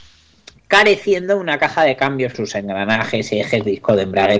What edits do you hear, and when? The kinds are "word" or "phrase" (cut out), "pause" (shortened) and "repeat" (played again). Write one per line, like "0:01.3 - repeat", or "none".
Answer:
0:02.3 - phrase